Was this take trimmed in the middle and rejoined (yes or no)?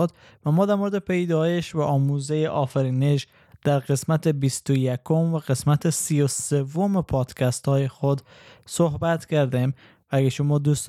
no